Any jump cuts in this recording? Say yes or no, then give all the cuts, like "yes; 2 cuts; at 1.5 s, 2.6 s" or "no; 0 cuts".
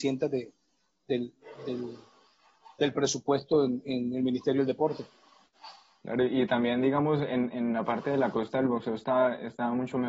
no; 0 cuts